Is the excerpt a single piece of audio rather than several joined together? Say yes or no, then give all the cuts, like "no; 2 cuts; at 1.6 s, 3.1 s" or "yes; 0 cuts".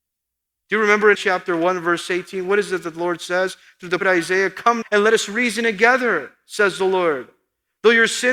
no; 3 cuts; at 1.1 s, 4.0 s, 4.8 s